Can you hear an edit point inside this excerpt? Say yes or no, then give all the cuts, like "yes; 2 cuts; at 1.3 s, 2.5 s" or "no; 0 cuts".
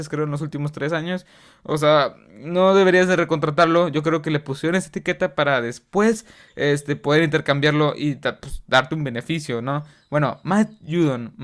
no; 0 cuts